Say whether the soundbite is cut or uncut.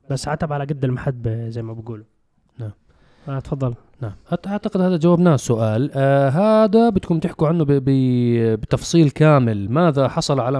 uncut